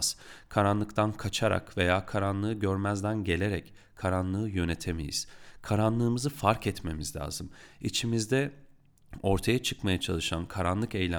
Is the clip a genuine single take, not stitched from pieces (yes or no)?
yes